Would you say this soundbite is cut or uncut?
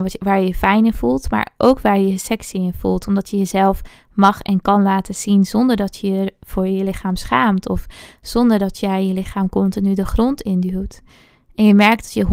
uncut